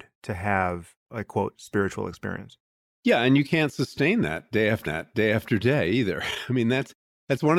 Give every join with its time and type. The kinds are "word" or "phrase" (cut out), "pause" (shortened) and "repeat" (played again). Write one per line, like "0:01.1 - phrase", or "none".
0:01.0 - pause
0:04.9 - repeat